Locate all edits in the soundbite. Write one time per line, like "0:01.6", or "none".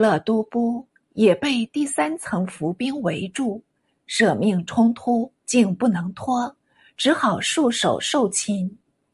0:05.4